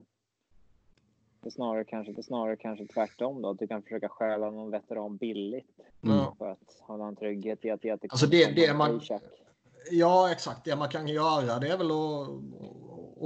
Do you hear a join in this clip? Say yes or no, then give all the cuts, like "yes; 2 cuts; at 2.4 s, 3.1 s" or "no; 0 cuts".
yes; 3 cuts; at 2.2 s, 5.9 s, 7.8 s